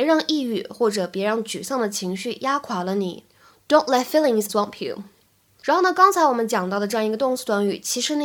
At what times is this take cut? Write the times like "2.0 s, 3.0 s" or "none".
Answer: 4.5 s